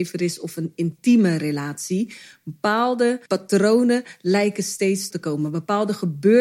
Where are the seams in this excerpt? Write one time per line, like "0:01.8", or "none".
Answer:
0:03.3
0:05.1

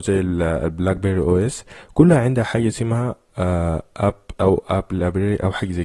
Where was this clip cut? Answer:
0:04.4

